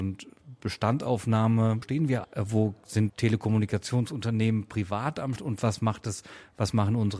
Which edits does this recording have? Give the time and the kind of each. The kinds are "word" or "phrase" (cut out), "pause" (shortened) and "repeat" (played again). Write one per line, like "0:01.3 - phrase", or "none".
0:01.8 - word
0:02.2 - word
0:03.1 - word
0:05.4 - word